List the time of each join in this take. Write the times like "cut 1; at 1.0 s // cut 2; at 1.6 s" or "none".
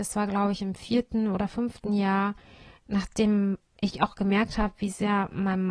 none